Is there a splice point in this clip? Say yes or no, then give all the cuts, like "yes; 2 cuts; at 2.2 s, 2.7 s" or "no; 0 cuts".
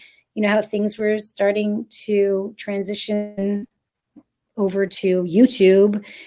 no; 0 cuts